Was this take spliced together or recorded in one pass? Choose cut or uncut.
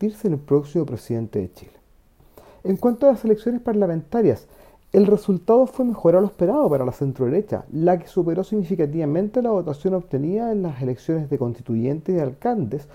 uncut